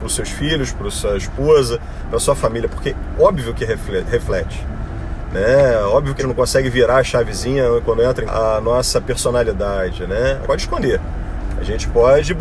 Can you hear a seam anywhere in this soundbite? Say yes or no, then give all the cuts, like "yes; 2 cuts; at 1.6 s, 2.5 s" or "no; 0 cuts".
yes; 3 cuts; at 6.2 s, 8.3 s, 10.4 s